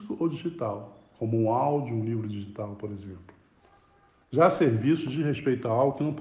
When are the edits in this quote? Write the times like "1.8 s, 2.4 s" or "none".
none